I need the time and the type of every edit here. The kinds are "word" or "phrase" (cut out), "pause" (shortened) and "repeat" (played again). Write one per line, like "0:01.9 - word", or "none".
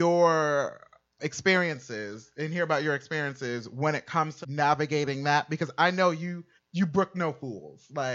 0:01.2 - word
0:04.4 - word
0:06.6 - word